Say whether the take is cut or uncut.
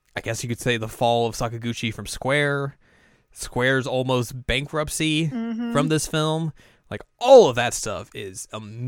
uncut